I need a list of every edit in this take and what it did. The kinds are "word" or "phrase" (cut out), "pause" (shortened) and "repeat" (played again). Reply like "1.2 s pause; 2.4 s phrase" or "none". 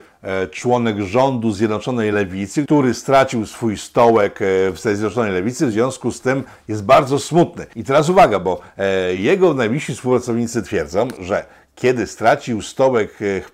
none